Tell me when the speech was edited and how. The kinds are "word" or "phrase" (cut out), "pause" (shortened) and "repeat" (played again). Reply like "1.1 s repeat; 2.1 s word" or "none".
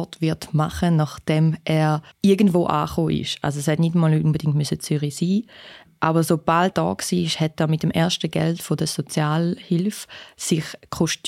2.1 s pause; 6.7 s word

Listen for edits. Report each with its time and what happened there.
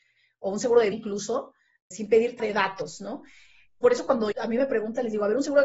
0.9 s word; 1.9 s word; 2.4 s word; 4.3 s word

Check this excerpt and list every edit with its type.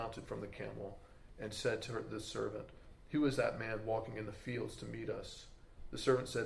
none

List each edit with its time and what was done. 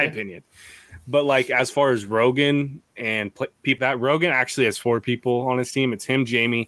3.8 s word

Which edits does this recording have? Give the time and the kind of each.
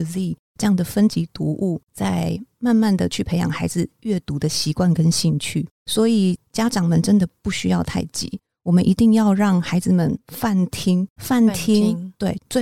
5.7 s pause; 11.2 s word

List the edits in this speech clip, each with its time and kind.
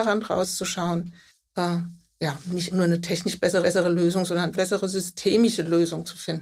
1.3 s pause; 2.7 s word; 3.6 s repeat; 4.5 s phrase

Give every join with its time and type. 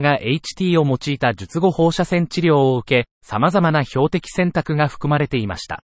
3.1 s pause

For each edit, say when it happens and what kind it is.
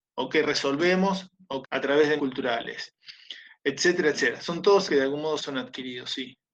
1.6 s phrase; 2.2 s word; 4.9 s word; 5.4 s word

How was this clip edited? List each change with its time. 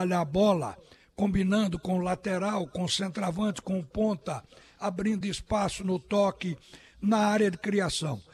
none

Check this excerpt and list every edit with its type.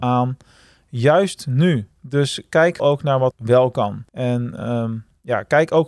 2.0 s pause; 2.8 s word; 3.3 s word; 4.1 s pause

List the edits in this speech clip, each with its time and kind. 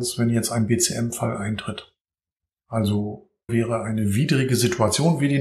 3.5 s word

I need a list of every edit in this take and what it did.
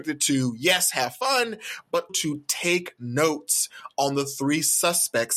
2.1 s word

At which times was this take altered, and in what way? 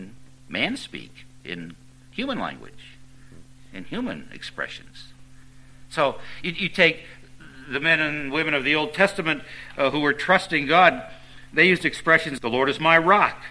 12.4 s word

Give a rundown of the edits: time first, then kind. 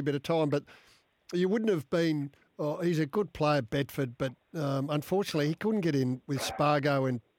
2.4 s pause

